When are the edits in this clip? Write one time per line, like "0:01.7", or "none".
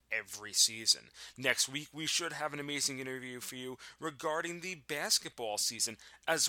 none